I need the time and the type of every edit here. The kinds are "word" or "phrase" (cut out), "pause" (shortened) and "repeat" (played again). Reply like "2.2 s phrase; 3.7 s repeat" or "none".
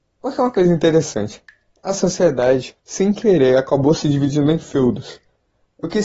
2.8 s pause